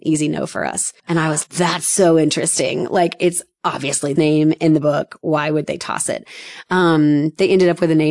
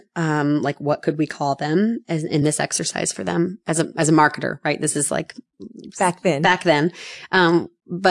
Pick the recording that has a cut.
first; 3 cuts; at 1.0 s, 1.4 s, 4.2 s

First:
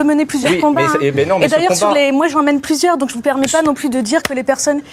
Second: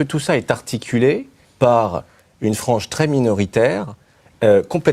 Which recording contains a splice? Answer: second; 1 cut; at 1.4 s

